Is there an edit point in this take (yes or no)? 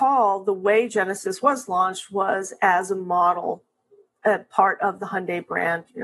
no